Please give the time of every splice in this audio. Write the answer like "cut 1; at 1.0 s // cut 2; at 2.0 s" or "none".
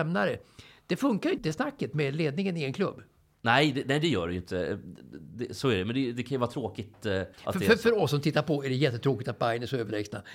cut 1; at 1.4 s // cut 2; at 7.3 s